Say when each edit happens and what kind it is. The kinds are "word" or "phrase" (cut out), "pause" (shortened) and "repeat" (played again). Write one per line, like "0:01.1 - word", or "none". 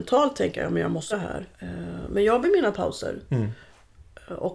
0:01.1 - word
0:01.5 - pause
0:02.4 - word